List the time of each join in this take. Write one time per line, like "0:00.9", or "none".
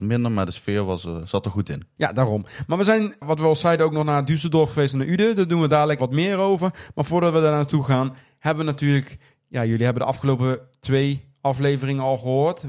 0:06.0